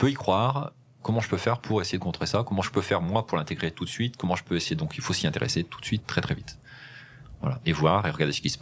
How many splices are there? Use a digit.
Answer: 0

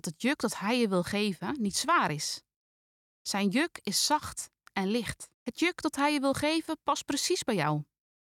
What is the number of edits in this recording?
1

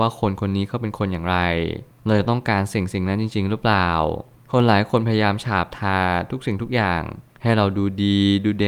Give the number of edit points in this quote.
0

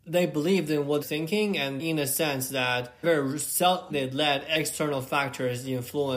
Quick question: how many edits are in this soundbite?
4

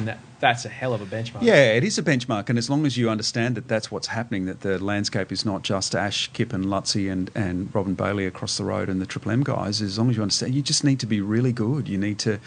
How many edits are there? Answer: 0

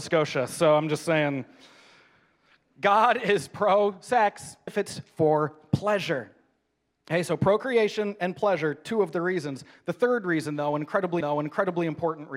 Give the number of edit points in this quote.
2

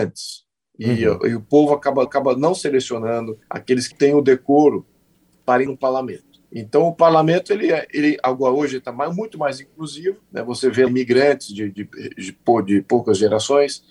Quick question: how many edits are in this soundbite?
7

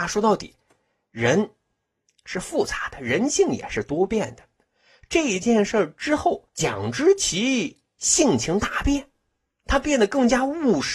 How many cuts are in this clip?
1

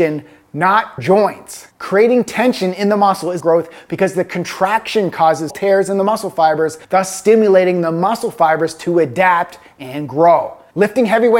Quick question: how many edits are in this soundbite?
4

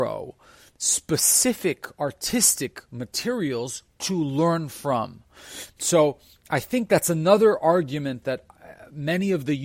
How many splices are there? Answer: 0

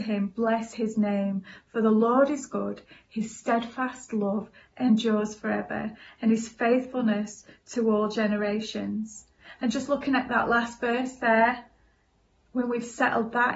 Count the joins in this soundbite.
0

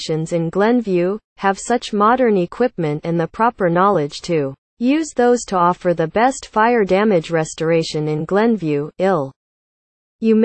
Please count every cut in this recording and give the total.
2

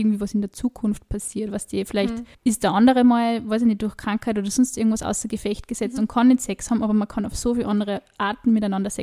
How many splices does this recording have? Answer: 1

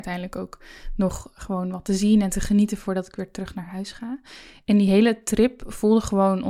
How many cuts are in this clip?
0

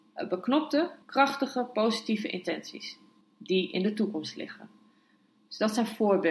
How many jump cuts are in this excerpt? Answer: 2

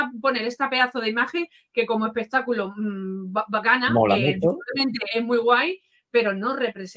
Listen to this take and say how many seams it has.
0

